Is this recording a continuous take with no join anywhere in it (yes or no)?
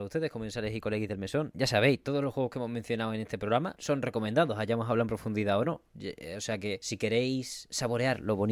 yes